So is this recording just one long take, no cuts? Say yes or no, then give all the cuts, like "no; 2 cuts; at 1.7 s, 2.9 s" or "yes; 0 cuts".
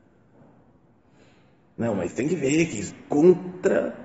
no; 2 cuts; at 2.1 s, 2.9 s